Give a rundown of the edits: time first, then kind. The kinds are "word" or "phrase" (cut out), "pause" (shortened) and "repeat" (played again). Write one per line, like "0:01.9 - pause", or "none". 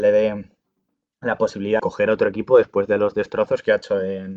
0:01.8 - word